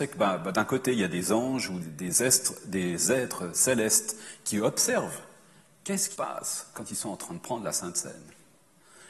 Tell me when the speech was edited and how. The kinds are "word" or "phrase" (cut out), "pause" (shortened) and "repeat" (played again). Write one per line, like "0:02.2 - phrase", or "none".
0:01.8 - word
0:06.1 - word